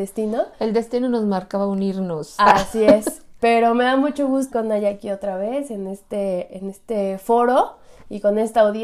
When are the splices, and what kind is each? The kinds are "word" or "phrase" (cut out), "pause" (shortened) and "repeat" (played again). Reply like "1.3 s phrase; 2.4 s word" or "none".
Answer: 4.5 s word